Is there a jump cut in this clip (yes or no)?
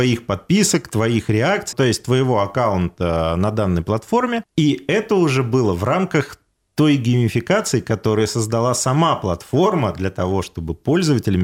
yes